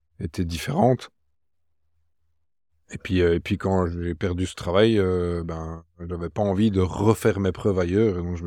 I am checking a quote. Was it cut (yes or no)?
no